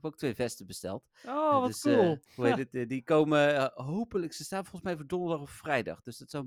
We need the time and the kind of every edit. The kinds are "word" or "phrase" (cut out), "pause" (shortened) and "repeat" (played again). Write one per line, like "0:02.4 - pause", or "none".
0:02.3 - pause